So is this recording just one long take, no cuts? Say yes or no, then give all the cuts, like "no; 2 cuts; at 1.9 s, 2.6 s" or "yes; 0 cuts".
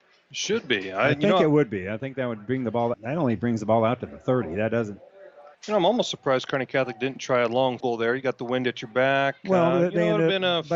no; 3 cuts; at 2.9 s, 5.5 s, 7.8 s